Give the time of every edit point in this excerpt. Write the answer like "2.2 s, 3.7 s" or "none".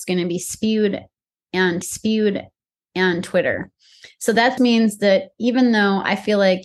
1.8 s, 4.6 s